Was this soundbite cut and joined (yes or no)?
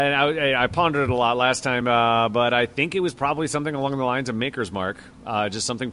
no